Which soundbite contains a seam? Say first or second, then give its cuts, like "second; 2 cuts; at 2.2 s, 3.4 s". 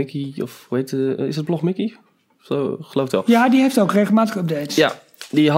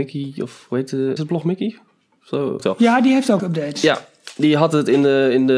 second; 3 cuts; at 1.2 s, 2.6 s, 3.4 s